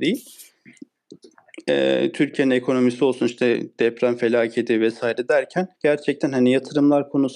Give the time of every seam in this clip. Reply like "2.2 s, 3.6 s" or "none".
5.7 s